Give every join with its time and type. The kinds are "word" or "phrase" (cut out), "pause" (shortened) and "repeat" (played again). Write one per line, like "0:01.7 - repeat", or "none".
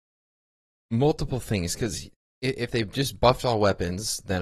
none